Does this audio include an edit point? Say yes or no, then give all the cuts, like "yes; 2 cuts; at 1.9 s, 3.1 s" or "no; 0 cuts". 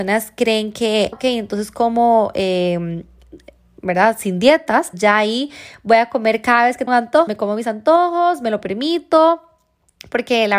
yes; 4 cuts; at 1.1 s, 4.9 s, 6.9 s, 7.3 s